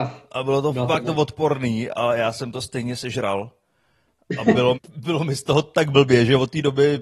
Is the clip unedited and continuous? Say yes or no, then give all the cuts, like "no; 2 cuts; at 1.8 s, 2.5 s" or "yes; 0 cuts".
no; 1 cut; at 4.7 s